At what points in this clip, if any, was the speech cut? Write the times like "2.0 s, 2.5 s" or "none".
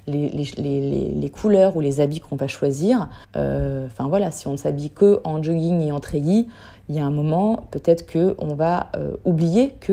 3.2 s